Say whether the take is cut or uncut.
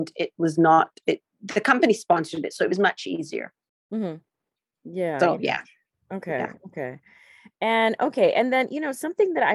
uncut